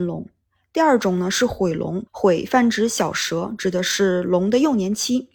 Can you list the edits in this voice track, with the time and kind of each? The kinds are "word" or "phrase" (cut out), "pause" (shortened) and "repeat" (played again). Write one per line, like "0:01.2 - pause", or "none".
0:02.1 - pause